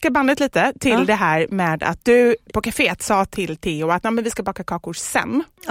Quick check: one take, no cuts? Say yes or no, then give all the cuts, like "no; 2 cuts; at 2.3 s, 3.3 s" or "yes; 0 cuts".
yes; 0 cuts